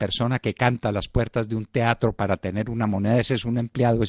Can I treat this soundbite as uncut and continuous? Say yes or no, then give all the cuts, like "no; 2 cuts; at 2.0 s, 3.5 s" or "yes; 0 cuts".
yes; 0 cuts